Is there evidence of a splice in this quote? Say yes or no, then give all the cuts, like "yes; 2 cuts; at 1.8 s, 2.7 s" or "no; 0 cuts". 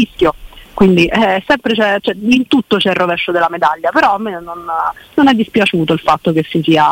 no; 0 cuts